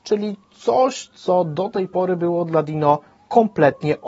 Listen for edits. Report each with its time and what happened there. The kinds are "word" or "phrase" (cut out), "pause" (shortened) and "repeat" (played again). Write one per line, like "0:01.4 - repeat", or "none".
none